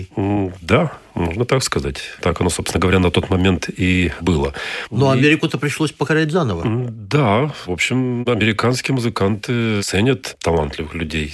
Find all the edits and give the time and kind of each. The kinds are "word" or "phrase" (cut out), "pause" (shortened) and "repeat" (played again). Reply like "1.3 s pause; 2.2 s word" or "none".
none

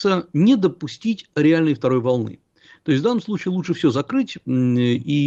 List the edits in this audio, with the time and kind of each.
none

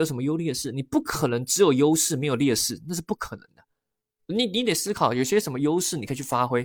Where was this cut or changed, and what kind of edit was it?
none

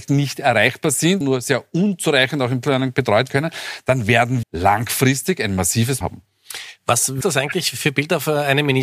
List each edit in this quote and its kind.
1.2 s word; 2.6 s word; 3.3 s word; 4.4 s word; 6.0 s word; 7.2 s word

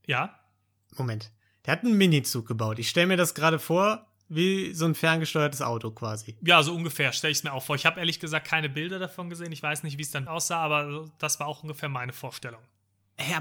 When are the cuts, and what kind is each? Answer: 10.3 s word

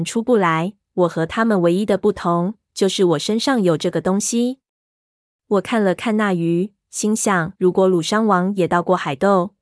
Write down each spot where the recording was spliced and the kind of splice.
7.6 s pause

